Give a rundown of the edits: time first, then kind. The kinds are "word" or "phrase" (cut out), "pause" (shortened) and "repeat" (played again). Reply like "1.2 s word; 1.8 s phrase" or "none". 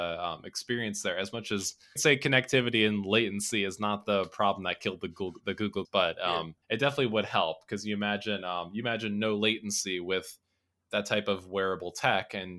2.0 s phrase; 5.8 s word; 6.6 s pause

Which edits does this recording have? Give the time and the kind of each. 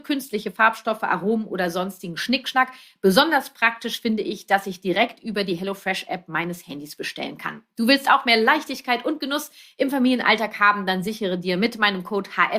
none

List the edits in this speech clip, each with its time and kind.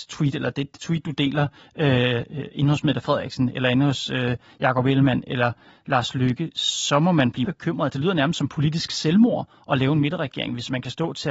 7.4 s word

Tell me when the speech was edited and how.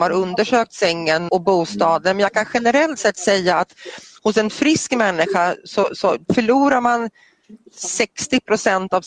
1.3 s word

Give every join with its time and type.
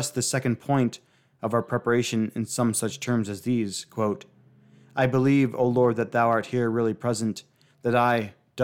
none

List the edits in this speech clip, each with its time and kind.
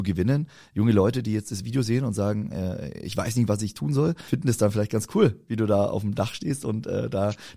4.3 s word

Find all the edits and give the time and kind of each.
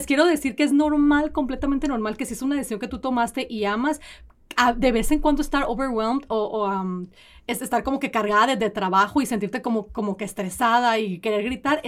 none

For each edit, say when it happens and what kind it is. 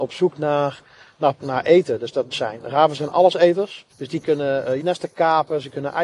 1.4 s word; 2.3 s phrase; 3.9 s pause; 4.2 s phrase; 4.8 s phrase

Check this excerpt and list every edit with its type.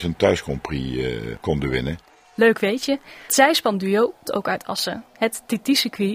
2.1 s pause; 3.3 s word; 4.2 s word; 5.1 s pause

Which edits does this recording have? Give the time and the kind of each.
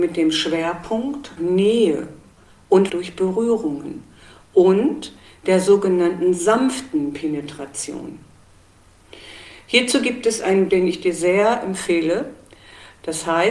1.4 s word; 2.9 s word; 10.7 s word

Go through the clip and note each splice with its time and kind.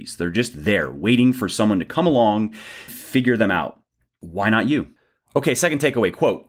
2.9 s word

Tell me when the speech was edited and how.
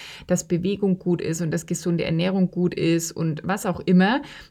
none

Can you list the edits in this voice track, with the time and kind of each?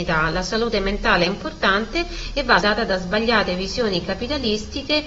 2.6 s word

